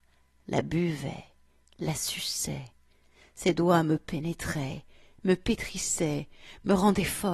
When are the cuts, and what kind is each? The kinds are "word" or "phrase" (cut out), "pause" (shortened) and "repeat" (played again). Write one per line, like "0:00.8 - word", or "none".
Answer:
none